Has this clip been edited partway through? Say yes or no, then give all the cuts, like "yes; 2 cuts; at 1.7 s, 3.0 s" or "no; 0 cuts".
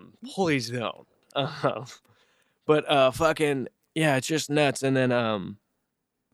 no; 0 cuts